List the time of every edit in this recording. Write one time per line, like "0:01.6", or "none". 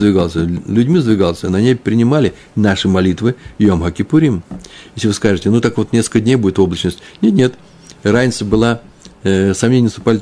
none